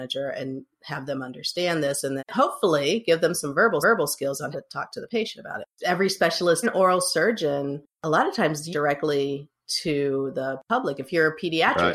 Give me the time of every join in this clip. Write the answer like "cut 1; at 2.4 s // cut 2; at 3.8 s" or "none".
cut 1; at 2.2 s // cut 2; at 3.8 s // cut 3; at 4.5 s // cut 4; at 5.8 s // cut 5; at 6.6 s // cut 6; at 7.9 s // cut 7; at 8.7 s